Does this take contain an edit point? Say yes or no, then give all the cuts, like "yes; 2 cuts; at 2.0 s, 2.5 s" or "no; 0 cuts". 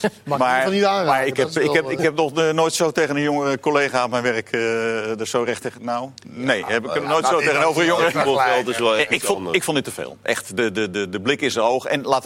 yes; 1 cut; at 6.2 s